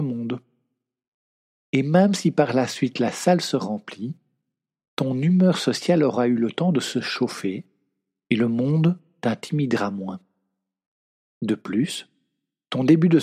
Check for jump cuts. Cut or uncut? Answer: uncut